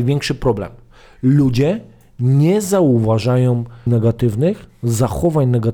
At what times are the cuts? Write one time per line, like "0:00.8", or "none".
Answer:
0:03.9